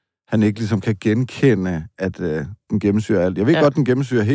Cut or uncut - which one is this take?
cut